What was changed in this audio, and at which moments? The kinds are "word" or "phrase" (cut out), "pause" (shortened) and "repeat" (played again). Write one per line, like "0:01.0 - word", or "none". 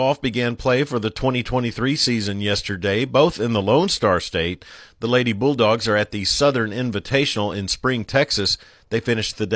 none